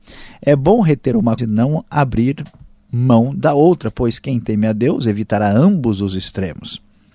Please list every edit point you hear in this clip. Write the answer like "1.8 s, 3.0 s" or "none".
1.4 s